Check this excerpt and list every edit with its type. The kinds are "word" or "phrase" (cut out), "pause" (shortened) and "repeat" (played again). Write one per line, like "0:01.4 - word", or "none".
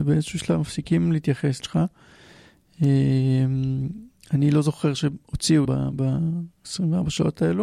0:01.6 - word
0:05.6 - phrase